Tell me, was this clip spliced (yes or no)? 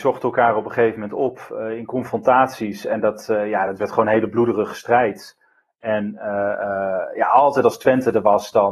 no